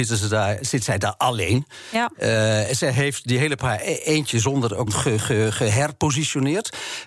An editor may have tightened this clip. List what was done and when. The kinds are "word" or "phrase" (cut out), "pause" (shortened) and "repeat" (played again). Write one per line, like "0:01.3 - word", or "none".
0:03.6 - phrase
0:04.9 - phrase